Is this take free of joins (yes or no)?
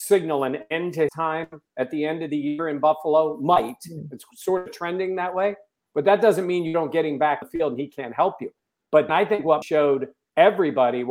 no